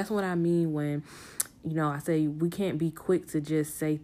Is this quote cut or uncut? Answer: uncut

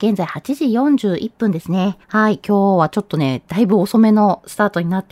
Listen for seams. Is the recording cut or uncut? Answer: cut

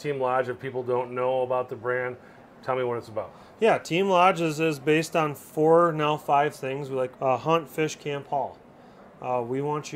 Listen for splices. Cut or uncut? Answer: cut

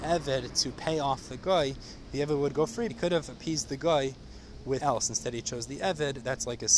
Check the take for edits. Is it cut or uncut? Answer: cut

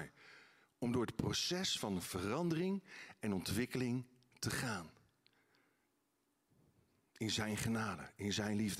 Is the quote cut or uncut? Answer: uncut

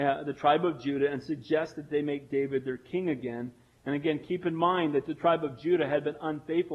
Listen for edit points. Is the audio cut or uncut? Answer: uncut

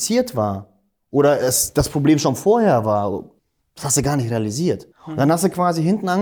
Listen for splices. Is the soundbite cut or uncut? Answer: cut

